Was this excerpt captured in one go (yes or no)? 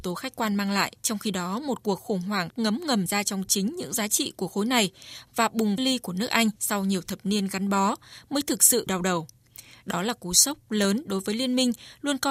no